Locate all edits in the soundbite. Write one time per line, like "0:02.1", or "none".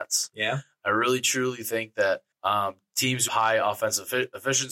0:02.3
0:03.3